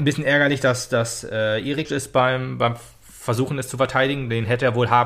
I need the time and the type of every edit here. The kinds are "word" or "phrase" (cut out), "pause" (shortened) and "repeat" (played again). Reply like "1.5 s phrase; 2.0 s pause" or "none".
1.8 s phrase

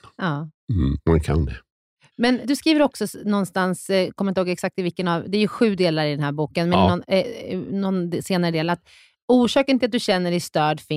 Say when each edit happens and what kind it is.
2.4 s word

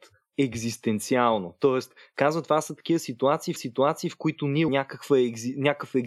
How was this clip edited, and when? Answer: 3.6 s repeat; 4.7 s word

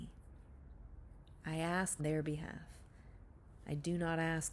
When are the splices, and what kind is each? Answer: 2.0 s word

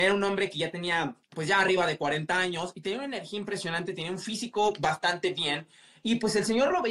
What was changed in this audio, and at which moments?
1.2 s pause

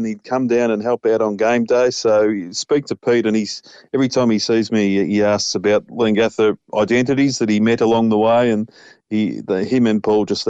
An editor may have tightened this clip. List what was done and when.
none

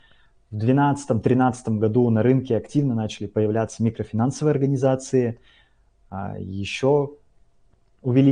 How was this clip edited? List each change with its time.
none

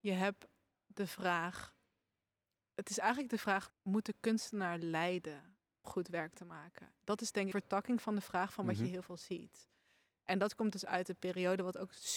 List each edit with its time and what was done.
3.7 s word; 5.8 s word; 7.5 s phrase

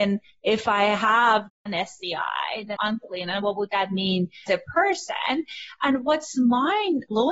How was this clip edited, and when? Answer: 2.8 s word; 4.5 s phrase

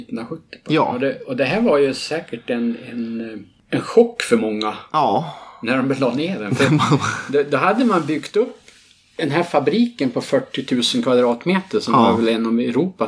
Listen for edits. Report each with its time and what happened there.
none

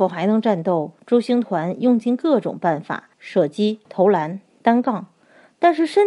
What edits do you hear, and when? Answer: 3.1 s pause; 3.8 s pause

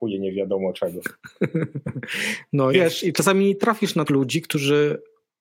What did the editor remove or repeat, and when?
2.7 s word; 3.1 s word; 4.1 s word

